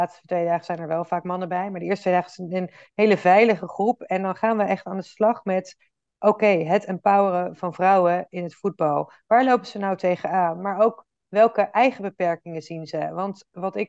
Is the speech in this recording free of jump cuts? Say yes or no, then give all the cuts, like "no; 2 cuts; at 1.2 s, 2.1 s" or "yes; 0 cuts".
yes; 0 cuts